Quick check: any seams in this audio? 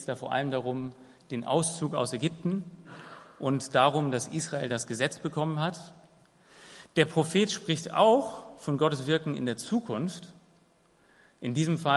no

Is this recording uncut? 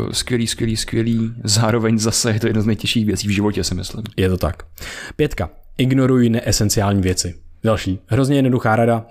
no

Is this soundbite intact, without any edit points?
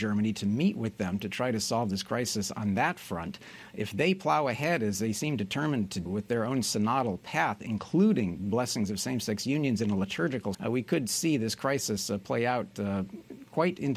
no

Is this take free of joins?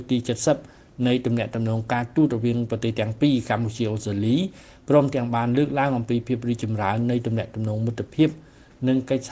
yes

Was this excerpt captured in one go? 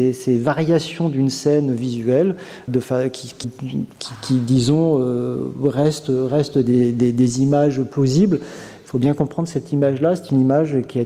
no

